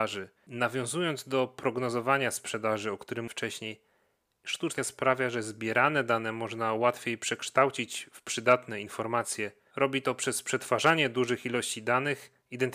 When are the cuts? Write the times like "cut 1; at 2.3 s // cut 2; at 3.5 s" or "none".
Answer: cut 1; at 3.3 s // cut 2; at 4.8 s